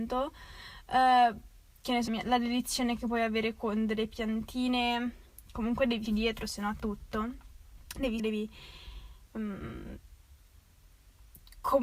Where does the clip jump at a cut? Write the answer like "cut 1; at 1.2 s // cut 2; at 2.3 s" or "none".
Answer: cut 1; at 2.1 s // cut 2; at 6.1 s // cut 3; at 6.8 s // cut 4; at 8.2 s

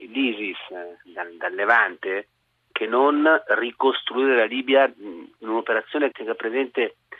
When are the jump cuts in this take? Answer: cut 1; at 6.1 s

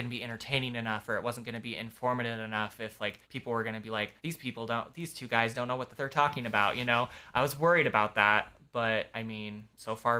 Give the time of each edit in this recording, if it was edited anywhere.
cut 1; at 3.2 s // cut 2; at 4.2 s // cut 3; at 6.0 s

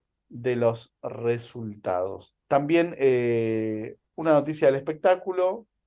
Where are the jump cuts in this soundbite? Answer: cut 1; at 2.4 s

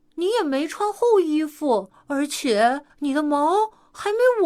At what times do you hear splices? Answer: cut 1; at 1.9 s // cut 2; at 2.9 s

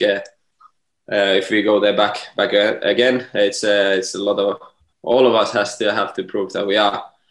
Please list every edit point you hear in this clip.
none

